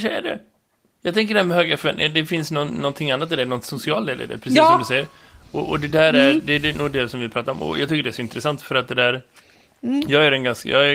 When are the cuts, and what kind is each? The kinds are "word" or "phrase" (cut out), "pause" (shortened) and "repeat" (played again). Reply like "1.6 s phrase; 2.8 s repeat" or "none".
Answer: none